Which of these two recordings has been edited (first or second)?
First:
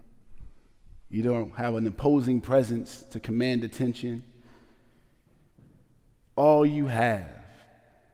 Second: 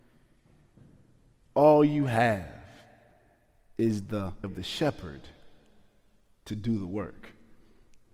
second